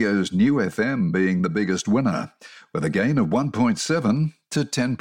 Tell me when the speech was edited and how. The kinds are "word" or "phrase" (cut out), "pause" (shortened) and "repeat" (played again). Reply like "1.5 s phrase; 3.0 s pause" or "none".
none